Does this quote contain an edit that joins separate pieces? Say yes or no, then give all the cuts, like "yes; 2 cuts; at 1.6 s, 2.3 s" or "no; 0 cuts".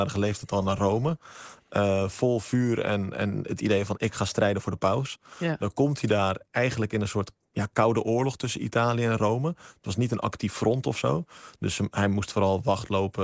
no; 0 cuts